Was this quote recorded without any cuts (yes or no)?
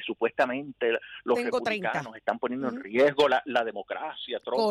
yes